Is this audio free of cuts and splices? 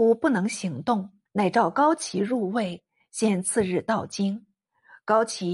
no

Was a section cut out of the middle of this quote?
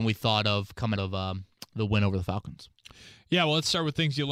yes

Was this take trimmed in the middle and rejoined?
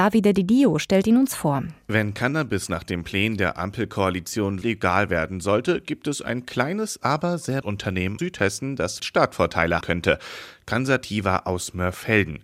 yes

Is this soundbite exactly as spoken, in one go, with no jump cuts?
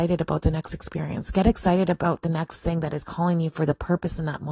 yes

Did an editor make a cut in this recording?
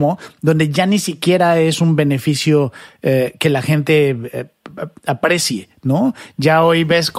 no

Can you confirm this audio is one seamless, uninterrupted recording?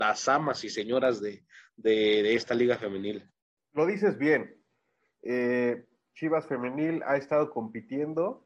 yes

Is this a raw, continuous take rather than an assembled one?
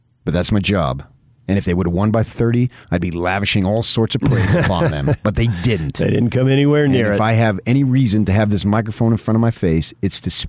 yes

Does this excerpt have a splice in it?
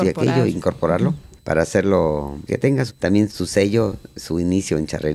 yes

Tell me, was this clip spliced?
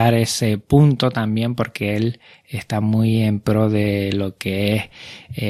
no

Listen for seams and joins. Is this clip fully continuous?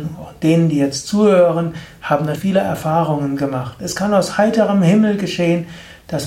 no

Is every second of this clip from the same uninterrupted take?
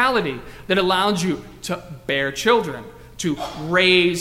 yes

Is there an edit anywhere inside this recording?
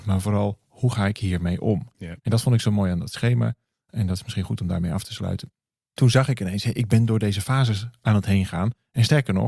no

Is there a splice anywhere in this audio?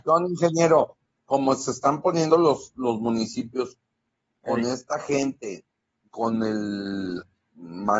no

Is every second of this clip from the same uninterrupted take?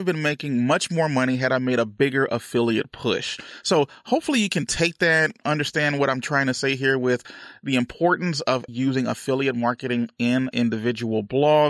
no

